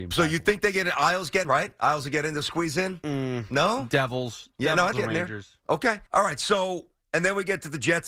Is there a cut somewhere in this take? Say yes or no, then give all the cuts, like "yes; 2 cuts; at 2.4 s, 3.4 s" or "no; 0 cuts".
yes; 4 cuts; at 1.4 s, 4.9 s, 5.6 s, 6.1 s